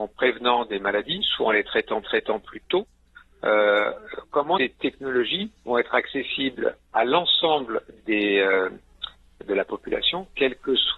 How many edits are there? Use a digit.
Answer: 5